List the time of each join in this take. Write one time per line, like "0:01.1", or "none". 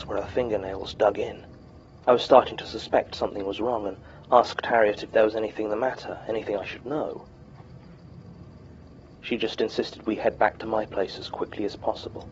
0:02.0